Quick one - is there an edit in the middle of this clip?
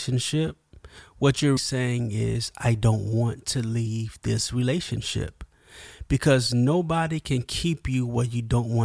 yes; 1 cut; at 1.6 s

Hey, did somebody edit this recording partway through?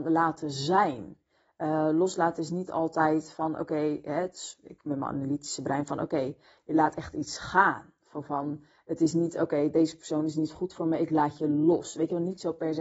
no; 0 cuts

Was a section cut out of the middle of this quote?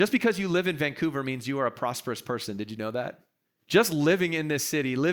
yes; 1 cut; at 3.4 s

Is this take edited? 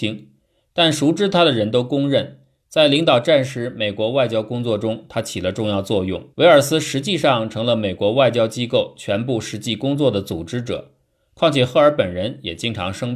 yes; 1 cut; at 6.3 s

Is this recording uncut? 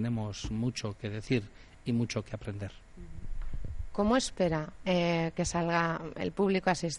yes; 0 cuts

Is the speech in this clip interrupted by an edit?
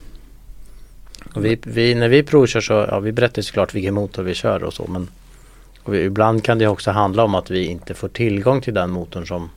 no; 0 cuts

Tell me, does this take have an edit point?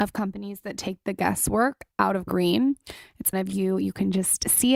yes; 3 cuts; at 1.9 s, 2.3 s, 3.3 s

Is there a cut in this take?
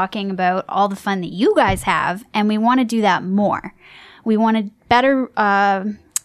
no; 0 cuts

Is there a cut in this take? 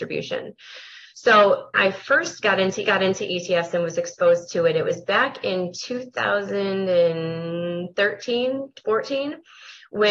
yes; 2 cuts; at 1.7 s, 2.8 s

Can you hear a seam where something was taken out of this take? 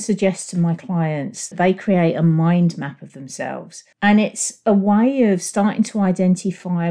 yes; 2 cuts; at 1.5 s, 3.9 s

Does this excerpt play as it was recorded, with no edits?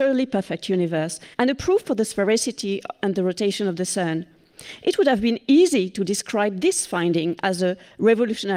no; 1 cut; at 1.3 s

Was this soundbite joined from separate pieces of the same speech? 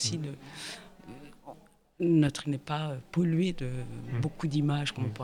yes; 1 cut; at 2.4 s

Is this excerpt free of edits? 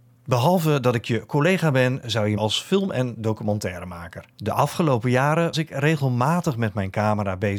no; 3 cuts; at 2.4 s, 4.3 s, 5.5 s

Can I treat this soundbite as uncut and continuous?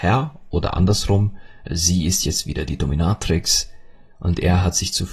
yes; 0 cuts

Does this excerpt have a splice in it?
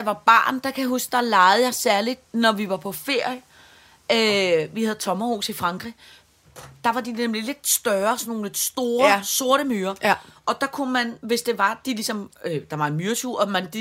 no; 0 cuts

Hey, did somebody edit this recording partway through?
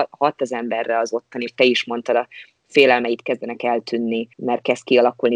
yes; 2 cuts; at 1.5 s, 4.3 s

